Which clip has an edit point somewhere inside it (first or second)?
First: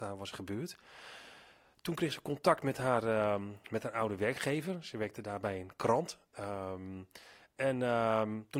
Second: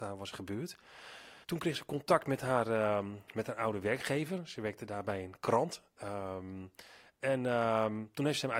second